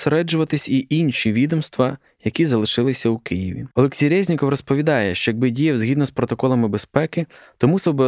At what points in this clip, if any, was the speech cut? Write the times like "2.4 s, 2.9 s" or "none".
3.7 s